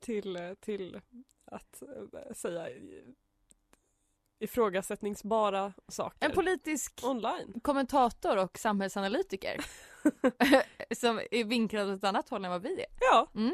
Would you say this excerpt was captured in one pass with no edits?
yes; 0 cuts

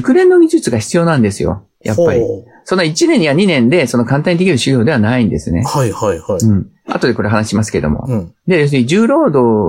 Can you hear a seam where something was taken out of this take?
yes; 2 cuts; at 1.7 s, 8.4 s

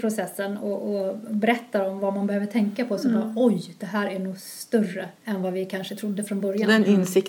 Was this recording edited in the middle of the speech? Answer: yes; 1 cut; at 5.2 s

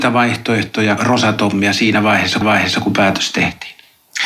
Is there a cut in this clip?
yes; 2 cuts; at 1.0 s, 2.4 s

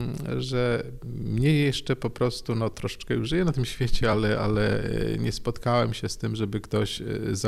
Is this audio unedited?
yes; 0 cuts

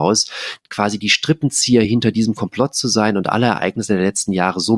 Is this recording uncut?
yes; 0 cuts

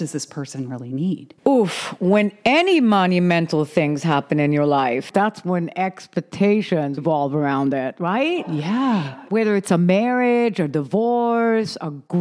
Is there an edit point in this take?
yes; 2 cuts; at 1.4 s, 7.0 s

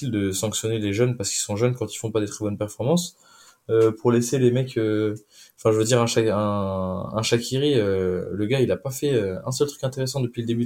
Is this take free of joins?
yes; 0 cuts

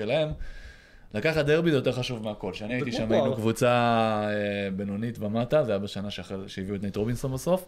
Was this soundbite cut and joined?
no; 0 cuts

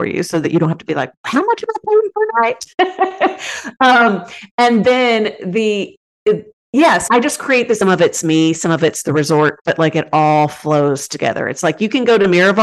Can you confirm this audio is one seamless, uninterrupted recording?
no; 2 cuts; at 7.1 s, 7.8 s

